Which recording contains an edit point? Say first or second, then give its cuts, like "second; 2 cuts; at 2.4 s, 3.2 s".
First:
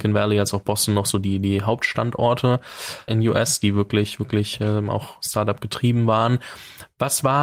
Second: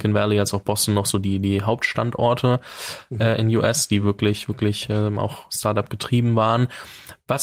first; 1 cut; at 3.1 s